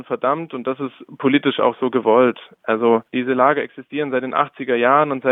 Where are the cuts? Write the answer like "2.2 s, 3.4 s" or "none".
3.1 s